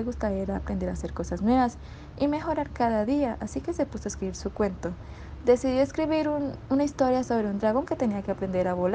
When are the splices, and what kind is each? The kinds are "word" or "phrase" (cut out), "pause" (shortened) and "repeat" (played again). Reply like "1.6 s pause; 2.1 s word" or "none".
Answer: none